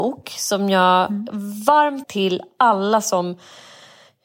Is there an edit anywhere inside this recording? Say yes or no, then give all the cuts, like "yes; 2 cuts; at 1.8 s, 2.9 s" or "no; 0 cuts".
yes; 1 cut; at 2.0 s